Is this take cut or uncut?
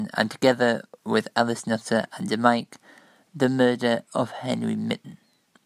uncut